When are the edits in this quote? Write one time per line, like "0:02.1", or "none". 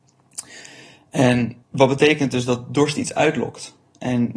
0:01.6